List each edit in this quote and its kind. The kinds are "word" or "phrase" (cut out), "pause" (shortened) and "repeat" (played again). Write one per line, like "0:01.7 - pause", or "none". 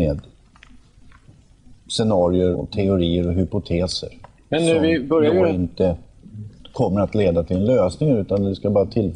0:02.5 - word